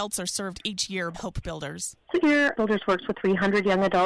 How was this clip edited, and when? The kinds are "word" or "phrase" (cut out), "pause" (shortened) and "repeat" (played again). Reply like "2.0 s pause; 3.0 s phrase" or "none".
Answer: 1.1 s word; 2.2 s word; 2.6 s word; 3.1 s word

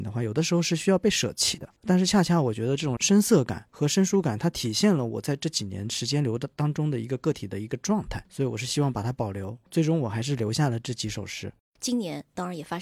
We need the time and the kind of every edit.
11.6 s pause

